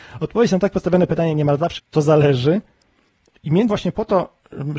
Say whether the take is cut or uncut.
cut